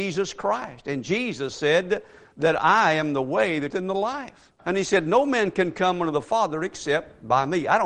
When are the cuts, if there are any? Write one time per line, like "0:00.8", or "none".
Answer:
0:03.7
0:04.6